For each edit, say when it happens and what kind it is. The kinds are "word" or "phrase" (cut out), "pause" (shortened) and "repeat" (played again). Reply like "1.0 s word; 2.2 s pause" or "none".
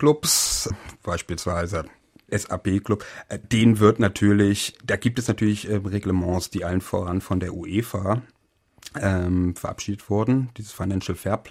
none